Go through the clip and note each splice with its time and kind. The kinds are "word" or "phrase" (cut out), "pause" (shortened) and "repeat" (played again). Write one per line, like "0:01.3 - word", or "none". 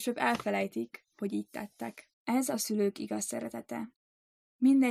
0:02.1 - pause